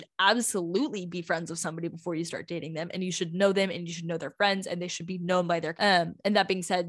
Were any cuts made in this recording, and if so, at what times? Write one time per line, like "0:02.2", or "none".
0:05.7